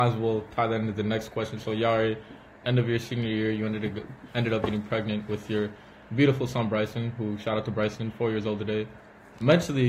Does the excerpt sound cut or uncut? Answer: uncut